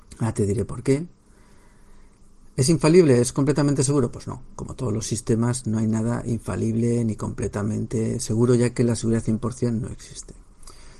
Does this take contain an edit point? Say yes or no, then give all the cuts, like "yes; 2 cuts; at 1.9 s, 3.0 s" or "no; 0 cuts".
no; 0 cuts